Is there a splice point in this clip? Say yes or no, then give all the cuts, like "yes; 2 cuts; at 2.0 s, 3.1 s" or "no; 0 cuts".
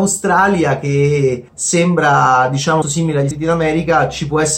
yes; 3 cuts; at 1.5 s, 2.8 s, 3.3 s